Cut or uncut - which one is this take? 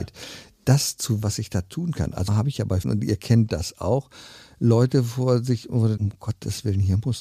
cut